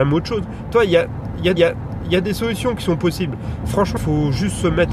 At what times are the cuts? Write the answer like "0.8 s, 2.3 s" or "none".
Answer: 1.6 s, 4.0 s